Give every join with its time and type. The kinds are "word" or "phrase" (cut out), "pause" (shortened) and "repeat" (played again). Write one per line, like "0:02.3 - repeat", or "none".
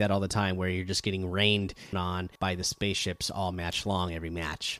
0:01.9 - word
0:02.4 - pause